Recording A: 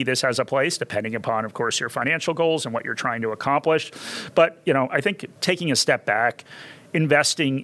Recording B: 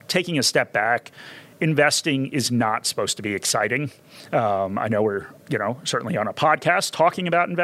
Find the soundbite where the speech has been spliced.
A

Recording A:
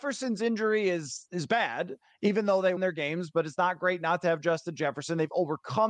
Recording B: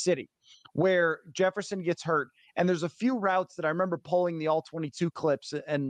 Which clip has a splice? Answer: A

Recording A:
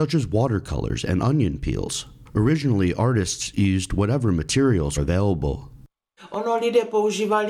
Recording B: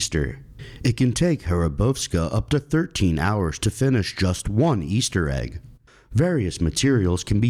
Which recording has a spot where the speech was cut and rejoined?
A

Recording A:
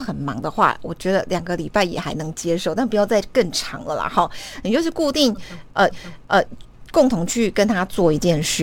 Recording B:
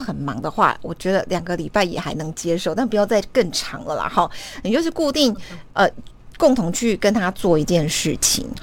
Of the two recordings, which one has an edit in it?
A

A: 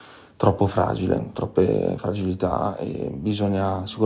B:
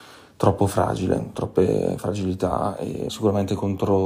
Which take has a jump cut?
B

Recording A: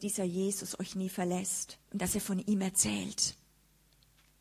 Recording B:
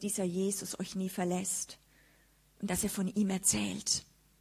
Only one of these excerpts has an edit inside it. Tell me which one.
A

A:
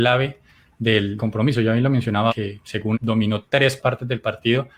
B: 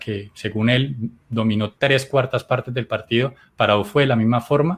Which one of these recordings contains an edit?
A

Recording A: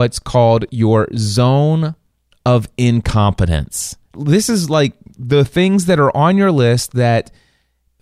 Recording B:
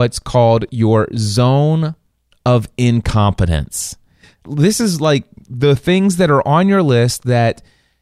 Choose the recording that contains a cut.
A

